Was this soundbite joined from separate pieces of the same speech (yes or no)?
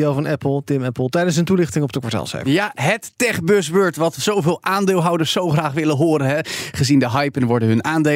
no